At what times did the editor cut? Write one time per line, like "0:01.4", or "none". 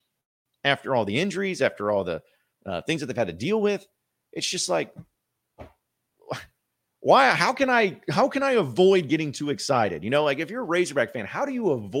none